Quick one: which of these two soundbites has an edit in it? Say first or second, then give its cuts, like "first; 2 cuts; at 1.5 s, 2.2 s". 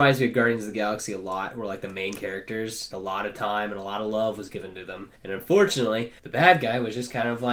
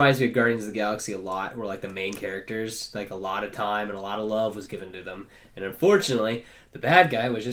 first; 3 cuts; at 2.9 s, 5.1 s, 6.2 s